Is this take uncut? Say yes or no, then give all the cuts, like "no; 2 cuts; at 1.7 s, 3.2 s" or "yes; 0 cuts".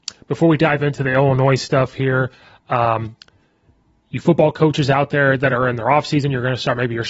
yes; 0 cuts